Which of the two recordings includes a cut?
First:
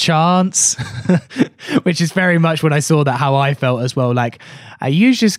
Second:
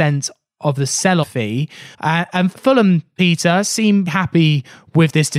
second; 4 cuts; at 1.2 s, 1.9 s, 2.5 s, 4.1 s

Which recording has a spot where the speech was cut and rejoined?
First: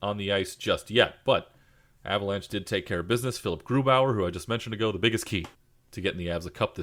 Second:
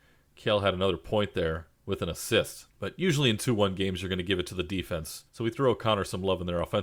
second; 3 cuts; at 1.7 s, 2.7 s, 5.3 s

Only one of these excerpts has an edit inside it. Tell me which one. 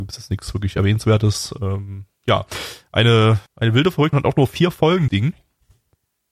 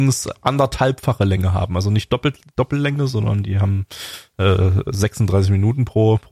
first; 3 cuts; at 3.5 s, 4.1 s, 5.1 s

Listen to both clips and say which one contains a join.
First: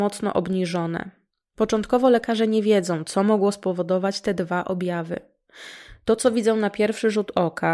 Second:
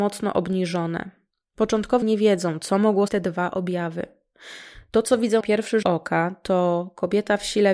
second; 4 cuts; at 2.0 s, 3.1 s, 5.4 s, 5.8 s

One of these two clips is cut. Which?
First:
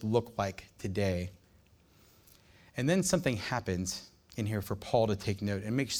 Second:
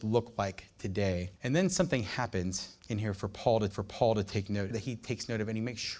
second; 4 cuts; at 1.4 s, 2.8 s, 3.7 s, 4.7 s

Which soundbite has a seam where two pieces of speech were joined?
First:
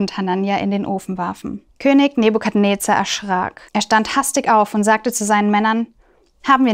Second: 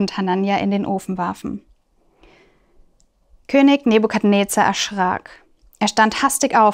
first; 2 cuts; at 1.7 s, 3.7 s

